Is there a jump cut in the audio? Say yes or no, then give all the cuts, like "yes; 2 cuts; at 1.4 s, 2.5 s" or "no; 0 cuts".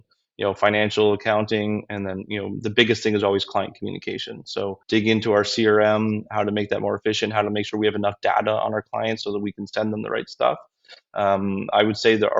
yes; 1 cut; at 4.8 s